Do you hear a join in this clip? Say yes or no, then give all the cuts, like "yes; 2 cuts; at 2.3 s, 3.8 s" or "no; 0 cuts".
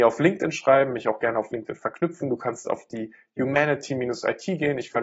no; 0 cuts